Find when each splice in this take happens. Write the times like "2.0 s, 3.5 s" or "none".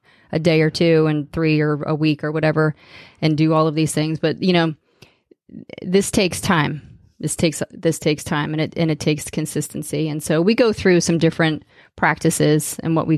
none

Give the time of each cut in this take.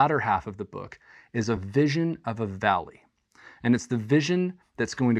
none

